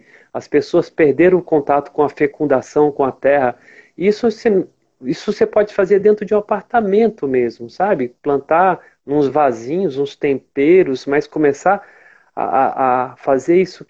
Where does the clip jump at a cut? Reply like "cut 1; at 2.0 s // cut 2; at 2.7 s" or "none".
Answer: none